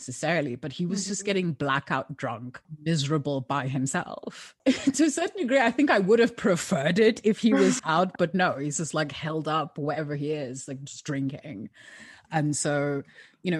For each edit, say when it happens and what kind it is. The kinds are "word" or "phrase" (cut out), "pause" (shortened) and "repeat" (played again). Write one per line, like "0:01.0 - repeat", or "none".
0:07.8 - word